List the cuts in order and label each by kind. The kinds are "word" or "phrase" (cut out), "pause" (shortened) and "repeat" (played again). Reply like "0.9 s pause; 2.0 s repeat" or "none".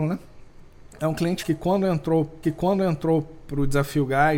0.9 s pause; 1.4 s word; 2.4 s repeat

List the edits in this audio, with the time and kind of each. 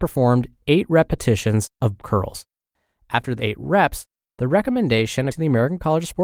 2.0 s word; 3.4 s word; 5.3 s word

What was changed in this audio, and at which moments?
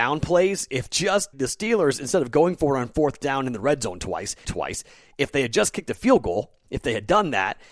1.3 s word; 4.4 s phrase

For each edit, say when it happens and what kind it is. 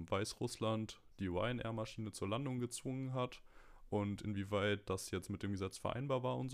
none

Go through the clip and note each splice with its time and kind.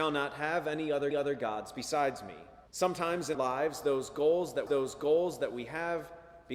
1.1 s repeat; 2.7 s pause; 3.3 s word; 4.7 s repeat

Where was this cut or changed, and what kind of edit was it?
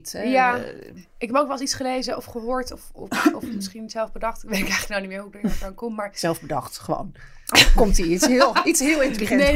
none

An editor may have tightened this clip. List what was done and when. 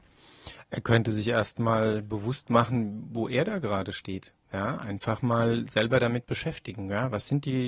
4.4 s pause

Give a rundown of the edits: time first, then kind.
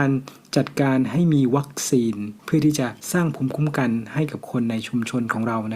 2.4 s pause

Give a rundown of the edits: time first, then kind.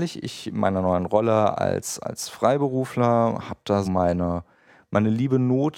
3.8 s word

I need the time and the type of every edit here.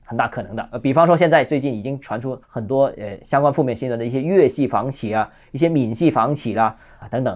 2.4 s pause

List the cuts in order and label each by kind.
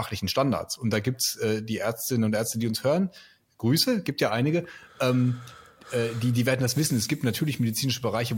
none

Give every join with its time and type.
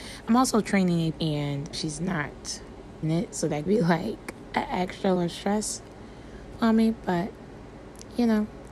1.1 s word; 1.7 s word; 3.0 s word; 3.7 s word; 5.2 s word

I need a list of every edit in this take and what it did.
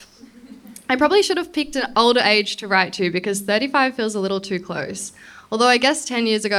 none

